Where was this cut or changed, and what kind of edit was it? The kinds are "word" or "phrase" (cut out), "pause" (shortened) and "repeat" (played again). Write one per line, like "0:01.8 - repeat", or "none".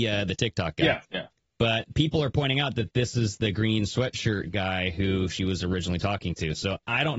0:01.0 - pause